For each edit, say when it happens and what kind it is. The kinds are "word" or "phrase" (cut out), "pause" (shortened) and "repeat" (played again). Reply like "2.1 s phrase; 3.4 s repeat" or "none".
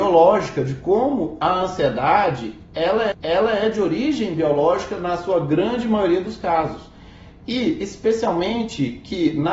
3.1 s repeat